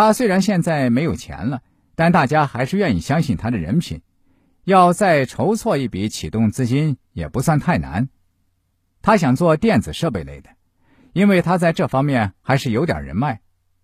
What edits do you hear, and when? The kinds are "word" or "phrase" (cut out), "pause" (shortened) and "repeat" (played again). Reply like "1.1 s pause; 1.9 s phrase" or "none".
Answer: none